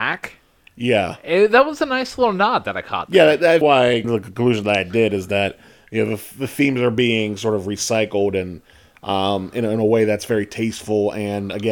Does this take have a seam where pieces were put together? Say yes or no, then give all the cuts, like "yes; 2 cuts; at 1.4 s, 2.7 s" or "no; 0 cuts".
yes; 2 cuts; at 3.6 s, 4.0 s